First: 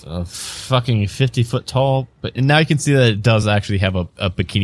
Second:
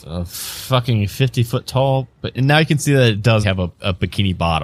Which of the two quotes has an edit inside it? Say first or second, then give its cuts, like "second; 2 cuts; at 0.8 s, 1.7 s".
second; 1 cut; at 3.4 s